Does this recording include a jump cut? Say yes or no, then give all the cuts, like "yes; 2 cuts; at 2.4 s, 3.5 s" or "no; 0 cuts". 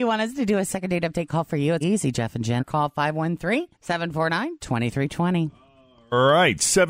yes; 3 cuts; at 1.8 s, 2.6 s, 3.7 s